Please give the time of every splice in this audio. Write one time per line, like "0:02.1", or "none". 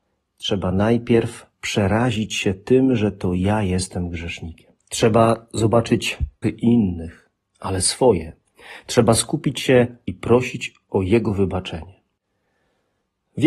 0:01.5
0:04.8
0:06.4
0:10.1